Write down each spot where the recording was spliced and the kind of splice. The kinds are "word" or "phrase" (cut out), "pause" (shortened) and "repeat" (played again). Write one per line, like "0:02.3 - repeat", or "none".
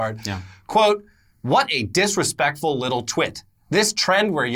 none